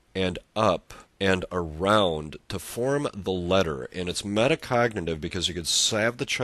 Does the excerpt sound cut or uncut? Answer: cut